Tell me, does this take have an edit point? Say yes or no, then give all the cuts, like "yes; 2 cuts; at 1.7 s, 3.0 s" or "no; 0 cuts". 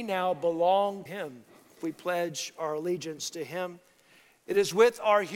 yes; 2 cuts; at 1.1 s, 1.8 s